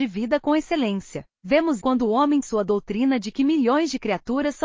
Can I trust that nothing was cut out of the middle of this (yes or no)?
no